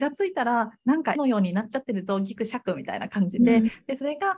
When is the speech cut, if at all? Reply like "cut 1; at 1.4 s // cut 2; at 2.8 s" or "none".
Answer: cut 1; at 1.1 s